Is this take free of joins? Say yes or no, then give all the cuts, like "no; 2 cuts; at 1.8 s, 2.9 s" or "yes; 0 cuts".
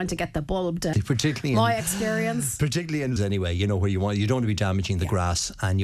no; 2 cuts; at 0.9 s, 3.2 s